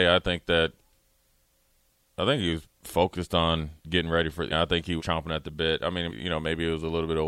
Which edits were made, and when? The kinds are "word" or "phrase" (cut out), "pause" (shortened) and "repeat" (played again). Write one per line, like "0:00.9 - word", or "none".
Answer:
0:02.6 - word
0:03.8 - pause
0:04.5 - phrase
0:05.0 - word
0:06.1 - word

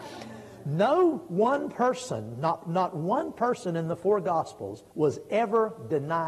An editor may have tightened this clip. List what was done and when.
0:04.9 - pause

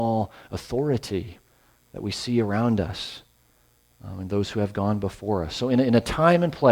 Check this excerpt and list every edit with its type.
none

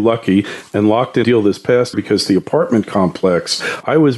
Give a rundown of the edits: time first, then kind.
0:01.2 - phrase
0:01.9 - word

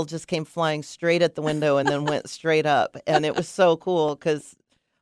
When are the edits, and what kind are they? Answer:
none

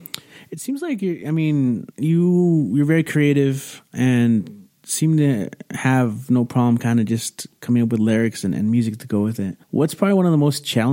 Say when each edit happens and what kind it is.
0:01.9 - pause
0:09.6 - pause

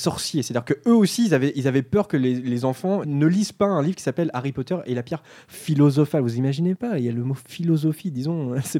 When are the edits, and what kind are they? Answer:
0:03.0 - word

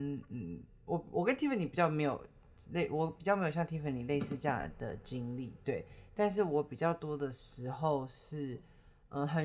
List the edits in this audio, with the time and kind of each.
none

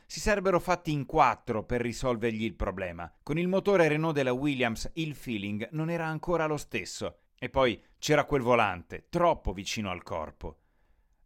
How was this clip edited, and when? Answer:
0:03.2 - pause
0:07.3 - pause

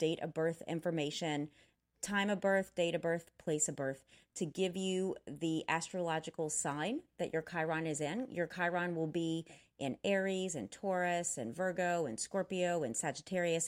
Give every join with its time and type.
none

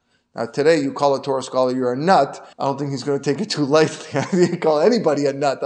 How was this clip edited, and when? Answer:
0:02.5 - pause

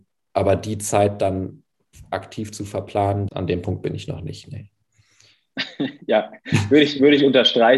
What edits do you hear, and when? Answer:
0:03.3 - word

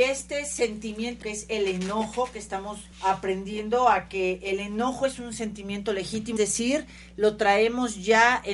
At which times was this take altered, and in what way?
0:01.2 - word
0:02.9 - pause
0:06.4 - word

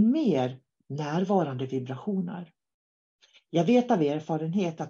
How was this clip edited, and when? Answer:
none

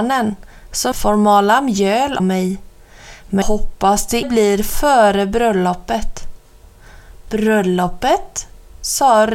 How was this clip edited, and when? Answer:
0:00.9 - word
0:02.2 - word
0:03.4 - word
0:04.2 - word

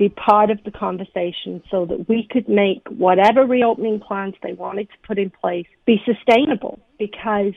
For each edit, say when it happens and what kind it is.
0:05.7 - pause

